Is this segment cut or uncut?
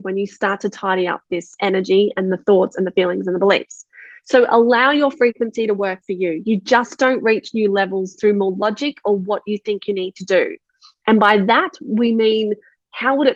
uncut